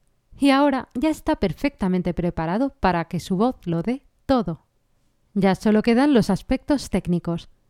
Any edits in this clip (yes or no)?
no